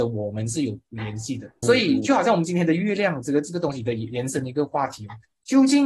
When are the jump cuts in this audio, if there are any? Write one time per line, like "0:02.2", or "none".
0:01.6